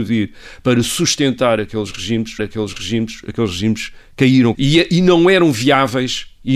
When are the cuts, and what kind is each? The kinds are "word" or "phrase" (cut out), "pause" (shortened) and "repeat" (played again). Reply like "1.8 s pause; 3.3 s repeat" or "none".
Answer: 2.4 s repeat; 4.5 s word